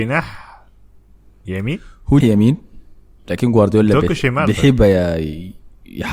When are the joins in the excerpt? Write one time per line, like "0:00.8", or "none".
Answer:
0:02.2